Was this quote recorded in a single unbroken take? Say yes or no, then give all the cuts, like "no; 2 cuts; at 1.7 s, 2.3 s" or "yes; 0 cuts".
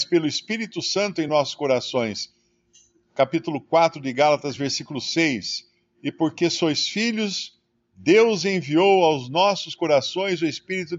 yes; 0 cuts